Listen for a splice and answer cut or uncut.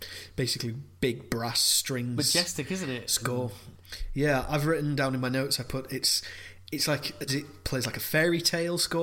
cut